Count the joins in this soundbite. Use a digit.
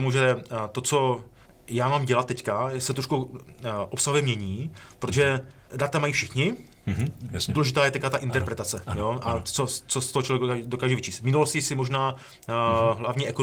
2